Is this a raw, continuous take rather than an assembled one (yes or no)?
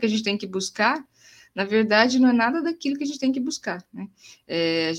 yes